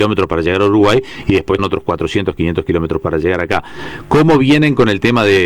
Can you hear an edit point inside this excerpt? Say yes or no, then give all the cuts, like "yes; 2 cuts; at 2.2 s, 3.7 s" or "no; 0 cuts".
yes; 1 cut; at 1.6 s